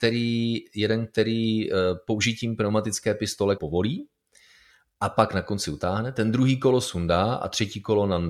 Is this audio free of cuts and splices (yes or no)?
no